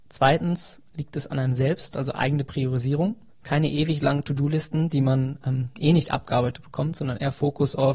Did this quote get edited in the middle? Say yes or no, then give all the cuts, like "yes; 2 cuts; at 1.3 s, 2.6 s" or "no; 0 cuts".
yes; 1 cut; at 3.3 s